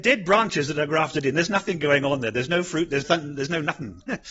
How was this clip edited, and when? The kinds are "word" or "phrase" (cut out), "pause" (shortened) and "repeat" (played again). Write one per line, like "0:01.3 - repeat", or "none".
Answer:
0:03.0 - phrase